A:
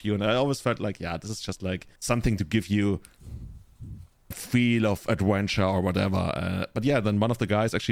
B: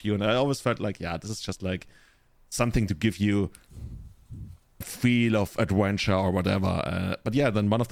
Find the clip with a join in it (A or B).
A